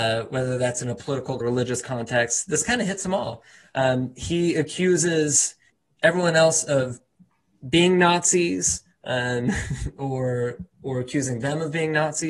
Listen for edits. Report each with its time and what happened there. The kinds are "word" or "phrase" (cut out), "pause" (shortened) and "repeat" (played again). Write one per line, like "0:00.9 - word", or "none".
0:01.4 - phrase
0:05.7 - pause